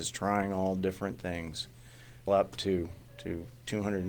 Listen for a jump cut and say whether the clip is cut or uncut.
cut